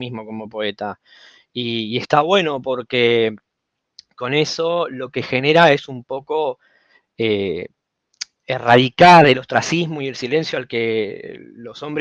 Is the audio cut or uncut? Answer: uncut